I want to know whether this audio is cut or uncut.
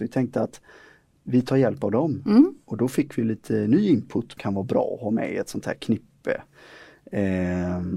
cut